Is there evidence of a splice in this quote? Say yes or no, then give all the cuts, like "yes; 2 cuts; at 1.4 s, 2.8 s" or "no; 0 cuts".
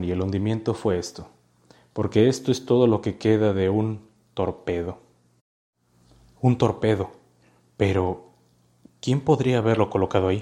no; 0 cuts